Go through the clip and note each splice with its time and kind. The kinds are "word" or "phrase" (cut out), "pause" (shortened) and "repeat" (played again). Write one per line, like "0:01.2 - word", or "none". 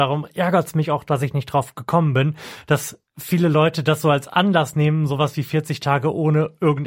none